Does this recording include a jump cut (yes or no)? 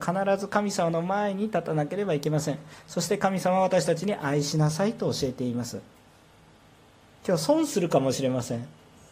no